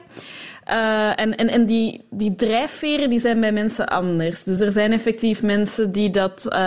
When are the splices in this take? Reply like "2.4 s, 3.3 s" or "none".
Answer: none

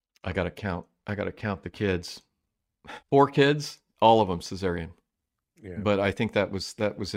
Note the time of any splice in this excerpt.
3.0 s, 5.3 s

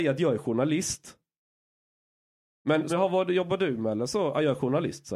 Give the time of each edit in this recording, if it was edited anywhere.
2.9 s

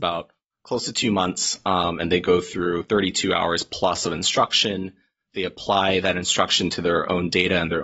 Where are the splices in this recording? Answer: none

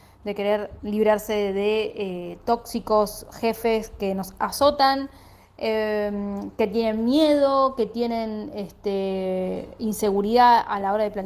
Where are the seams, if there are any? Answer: none

